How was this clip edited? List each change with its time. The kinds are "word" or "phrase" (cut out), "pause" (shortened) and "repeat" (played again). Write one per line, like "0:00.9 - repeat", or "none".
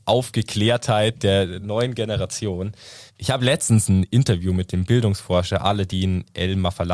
none